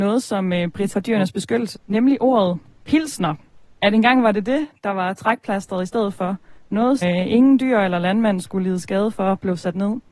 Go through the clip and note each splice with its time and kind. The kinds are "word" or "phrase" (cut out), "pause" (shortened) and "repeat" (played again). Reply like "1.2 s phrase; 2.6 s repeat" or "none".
0.9 s word; 1.7 s word; 7.0 s word